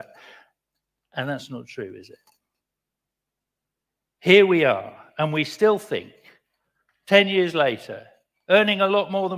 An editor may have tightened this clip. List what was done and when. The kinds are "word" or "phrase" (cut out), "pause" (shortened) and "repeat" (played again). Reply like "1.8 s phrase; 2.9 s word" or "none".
none